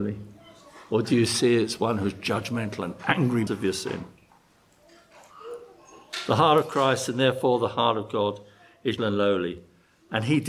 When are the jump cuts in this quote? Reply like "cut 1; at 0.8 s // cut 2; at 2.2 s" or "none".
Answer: cut 1; at 3.5 s // cut 2; at 9.0 s

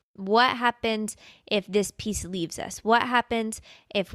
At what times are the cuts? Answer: none

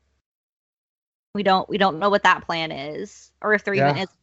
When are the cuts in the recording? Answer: none

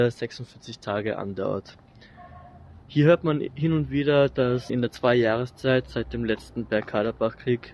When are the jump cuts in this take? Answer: cut 1; at 2.8 s // cut 2; at 4.7 s

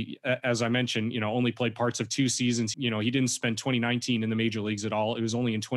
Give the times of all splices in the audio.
cut 1; at 2.7 s

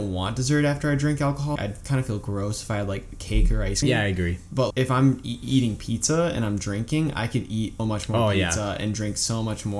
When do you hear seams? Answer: cut 1; at 1.6 s // cut 2; at 3.8 s // cut 3; at 4.7 s // cut 4; at 7.8 s

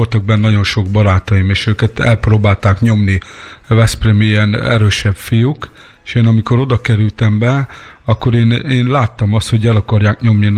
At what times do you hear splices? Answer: none

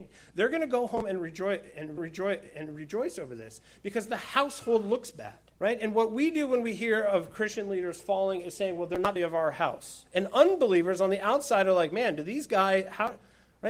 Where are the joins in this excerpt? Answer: cut 1; at 2.0 s // cut 2; at 5.5 s // cut 3; at 9.2 s

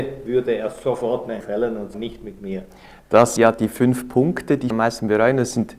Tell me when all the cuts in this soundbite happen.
cut 1; at 1.4 s // cut 2; at 1.9 s // cut 3; at 3.4 s // cut 4; at 4.7 s

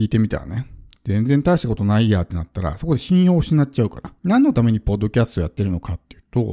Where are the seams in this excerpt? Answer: cut 1; at 4.2 s

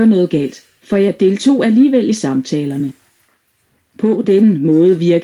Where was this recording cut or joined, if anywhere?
none

